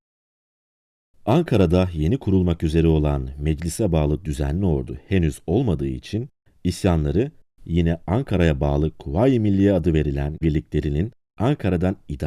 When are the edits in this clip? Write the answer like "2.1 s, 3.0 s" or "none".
10.4 s